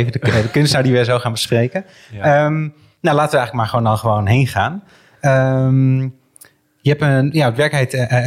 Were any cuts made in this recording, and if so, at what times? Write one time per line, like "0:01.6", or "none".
none